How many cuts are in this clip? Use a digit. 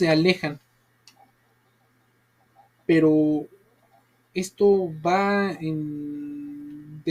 0